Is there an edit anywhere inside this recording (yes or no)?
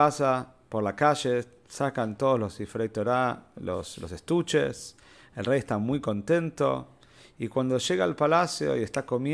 no